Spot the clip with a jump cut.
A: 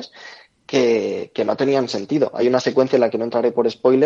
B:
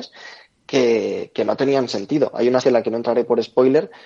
B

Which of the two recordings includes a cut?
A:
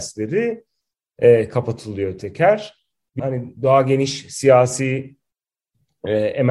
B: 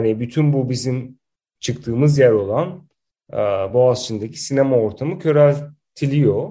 A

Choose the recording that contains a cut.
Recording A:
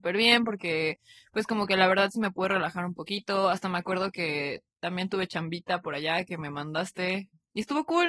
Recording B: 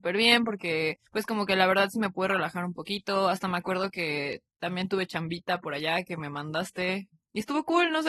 B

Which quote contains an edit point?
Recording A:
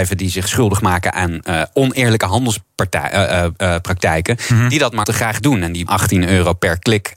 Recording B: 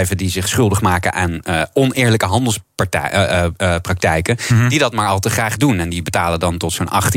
A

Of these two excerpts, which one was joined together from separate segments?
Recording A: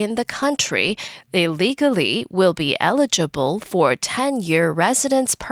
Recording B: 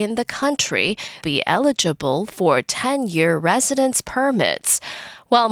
B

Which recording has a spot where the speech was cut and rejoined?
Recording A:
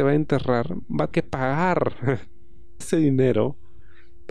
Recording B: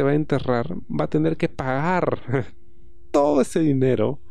A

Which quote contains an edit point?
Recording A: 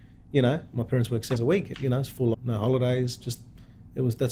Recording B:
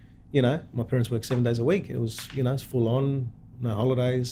A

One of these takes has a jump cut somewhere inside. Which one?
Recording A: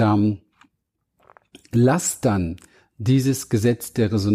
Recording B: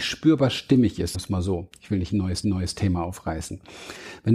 B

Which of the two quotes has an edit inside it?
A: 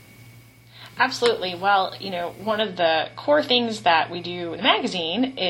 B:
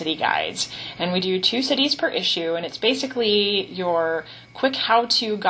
A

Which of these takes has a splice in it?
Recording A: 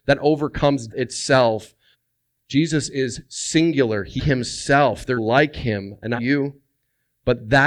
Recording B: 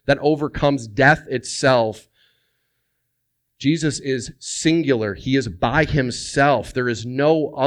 A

